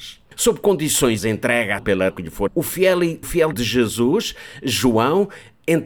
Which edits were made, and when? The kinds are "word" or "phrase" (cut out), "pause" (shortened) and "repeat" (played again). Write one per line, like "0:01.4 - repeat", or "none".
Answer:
0:01.2 - word
0:01.8 - word
0:02.1 - word
0:02.5 - word
0:03.2 - word
0:03.5 - word